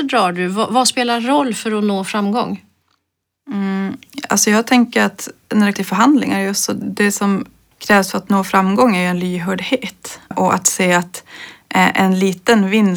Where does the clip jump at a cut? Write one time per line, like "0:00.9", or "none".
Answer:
0:05.8
0:07.7
0:10.3